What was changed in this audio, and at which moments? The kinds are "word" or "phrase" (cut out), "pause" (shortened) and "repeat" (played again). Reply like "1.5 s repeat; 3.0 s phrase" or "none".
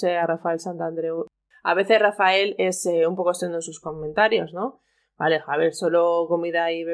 none